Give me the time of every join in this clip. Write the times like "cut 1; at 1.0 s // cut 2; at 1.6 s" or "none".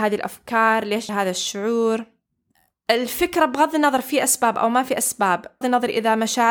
cut 1; at 1.1 s // cut 2; at 5.6 s